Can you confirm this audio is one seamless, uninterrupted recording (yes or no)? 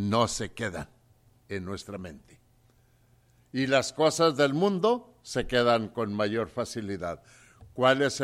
yes